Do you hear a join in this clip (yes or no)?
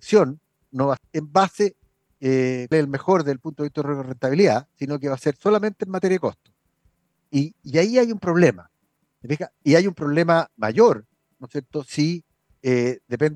yes